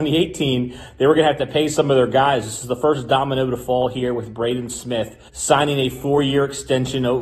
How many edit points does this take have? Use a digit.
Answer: 1